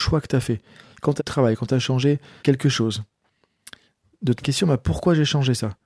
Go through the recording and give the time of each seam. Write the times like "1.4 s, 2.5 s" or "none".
1.2 s, 2.4 s, 4.4 s